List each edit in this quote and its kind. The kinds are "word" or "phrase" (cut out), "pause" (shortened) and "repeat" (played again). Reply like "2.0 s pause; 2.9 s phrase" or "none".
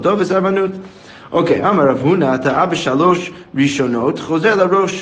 none

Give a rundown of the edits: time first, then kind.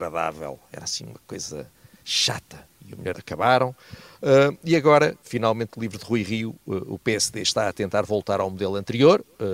3.1 s phrase

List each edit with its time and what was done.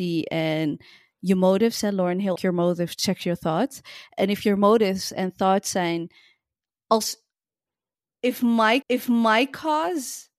2.4 s phrase; 8.8 s repeat

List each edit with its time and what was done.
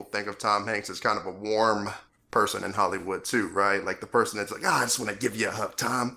2.1 s pause

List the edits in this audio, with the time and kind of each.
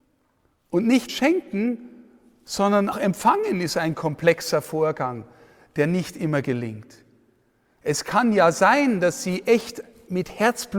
1.1 s word; 2.9 s word

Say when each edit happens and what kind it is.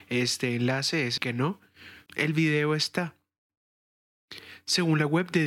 1.2 s word; 2.1 s word

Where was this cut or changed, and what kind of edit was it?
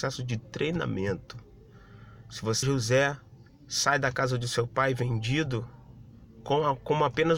2.6 s word; 3.5 s pause

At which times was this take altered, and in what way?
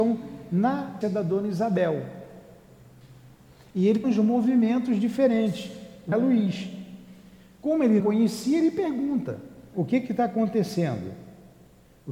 1.0 s word; 4.0 s word; 6.1 s word; 8.0 s word; 9.7 s word

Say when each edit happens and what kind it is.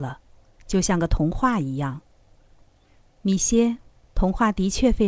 none

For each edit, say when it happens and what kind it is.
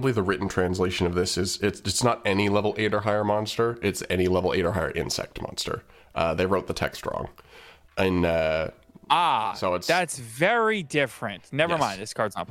none

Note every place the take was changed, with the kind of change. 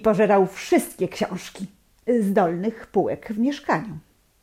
none

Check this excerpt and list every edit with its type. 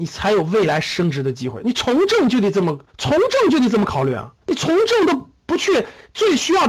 2.9 s pause; 4.4 s pause

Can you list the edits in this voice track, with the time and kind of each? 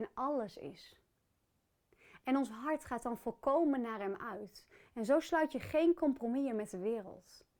none

